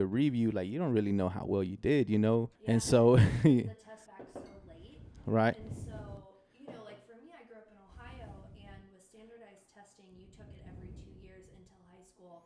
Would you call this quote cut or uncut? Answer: cut